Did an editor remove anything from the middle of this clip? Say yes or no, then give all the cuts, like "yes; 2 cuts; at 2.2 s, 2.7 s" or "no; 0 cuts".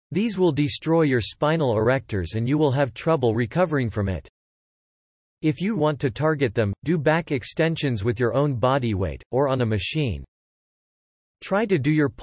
yes; 1 cut; at 5.8 s